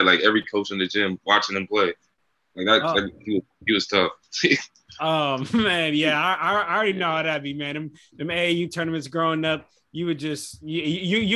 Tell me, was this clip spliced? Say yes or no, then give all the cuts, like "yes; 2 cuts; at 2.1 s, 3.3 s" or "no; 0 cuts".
no; 0 cuts